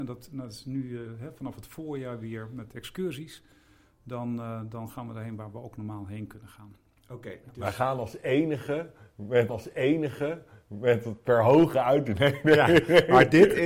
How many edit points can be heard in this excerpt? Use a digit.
1